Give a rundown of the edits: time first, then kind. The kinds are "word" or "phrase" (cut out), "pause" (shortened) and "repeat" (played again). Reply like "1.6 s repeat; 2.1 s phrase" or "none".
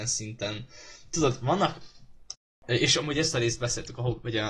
none